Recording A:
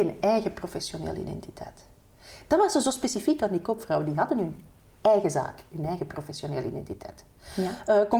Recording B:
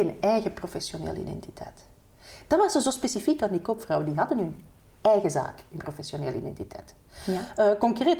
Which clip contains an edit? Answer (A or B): B